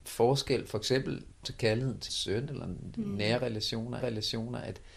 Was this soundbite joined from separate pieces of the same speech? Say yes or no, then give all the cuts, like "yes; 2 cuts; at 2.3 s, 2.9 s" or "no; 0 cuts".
yes; 3 cuts; at 1.4 s, 2.1 s, 4.0 s